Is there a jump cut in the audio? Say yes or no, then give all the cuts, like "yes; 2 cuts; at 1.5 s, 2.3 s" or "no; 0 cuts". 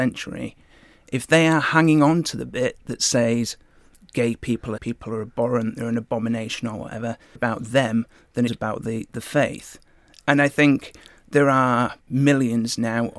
yes; 3 cuts; at 4.8 s, 7.4 s, 8.5 s